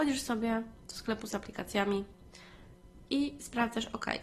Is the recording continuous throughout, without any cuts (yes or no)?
yes